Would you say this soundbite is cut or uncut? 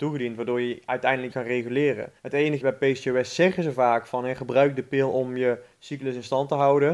cut